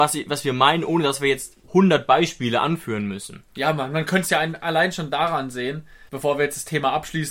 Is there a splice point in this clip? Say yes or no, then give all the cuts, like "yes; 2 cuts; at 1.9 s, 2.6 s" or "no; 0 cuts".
yes; 2 cuts; at 3.5 s, 6.1 s